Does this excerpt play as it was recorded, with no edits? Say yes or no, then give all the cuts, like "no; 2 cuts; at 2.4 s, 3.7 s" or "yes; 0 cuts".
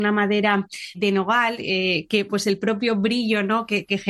no; 2 cuts; at 0.9 s, 2.3 s